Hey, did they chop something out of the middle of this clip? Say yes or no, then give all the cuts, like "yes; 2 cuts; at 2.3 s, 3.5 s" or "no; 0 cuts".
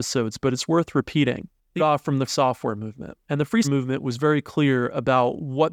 yes; 4 cuts; at 1.8 s, 2.3 s, 3.2 s, 3.6 s